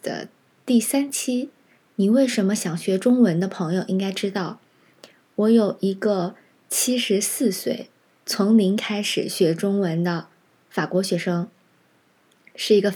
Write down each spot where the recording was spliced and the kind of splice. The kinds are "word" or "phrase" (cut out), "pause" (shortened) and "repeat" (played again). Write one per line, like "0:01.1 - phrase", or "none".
none